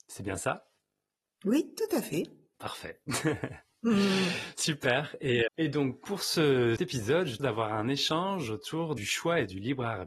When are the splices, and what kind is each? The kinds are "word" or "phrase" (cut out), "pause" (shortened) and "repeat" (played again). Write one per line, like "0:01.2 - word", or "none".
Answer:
0:05.5 - word
0:06.8 - word
0:07.4 - word
0:09.0 - phrase